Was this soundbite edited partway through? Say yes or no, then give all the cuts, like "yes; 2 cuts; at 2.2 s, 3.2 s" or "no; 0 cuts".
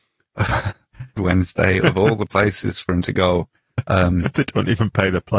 yes; 1 cut; at 1.2 s